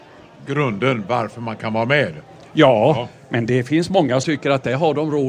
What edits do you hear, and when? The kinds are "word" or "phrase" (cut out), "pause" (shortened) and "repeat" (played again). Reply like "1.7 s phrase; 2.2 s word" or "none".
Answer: 3.5 s word; 4.2 s word

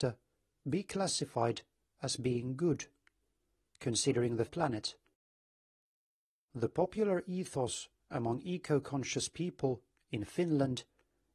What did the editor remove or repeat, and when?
4.5 s phrase

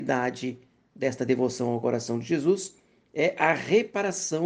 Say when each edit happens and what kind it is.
none

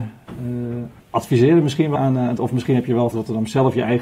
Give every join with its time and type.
1.0 s pause; 2.0 s word; 2.4 s word; 3.1 s word

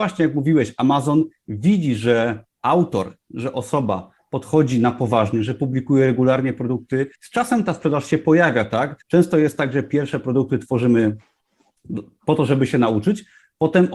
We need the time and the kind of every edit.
7.2 s pause; 9.0 s pause

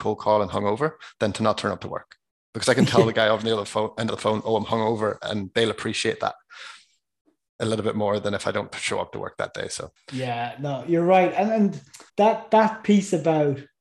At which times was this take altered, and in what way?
10.0 s pause; 12.1 s pause

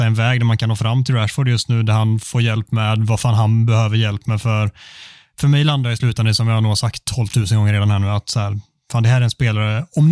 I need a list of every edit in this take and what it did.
none

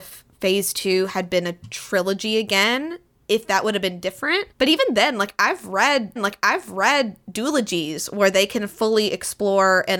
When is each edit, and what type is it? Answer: 4.5 s pause; 6.2 s repeat

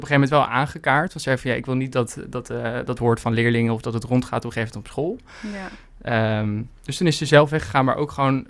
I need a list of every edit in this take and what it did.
3.0 s phrase

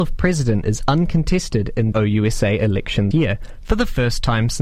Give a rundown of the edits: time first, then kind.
1.9 s phrase; 3.1 s word

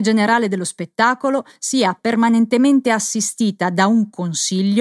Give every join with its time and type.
none

